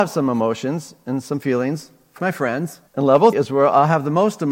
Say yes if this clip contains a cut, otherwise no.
yes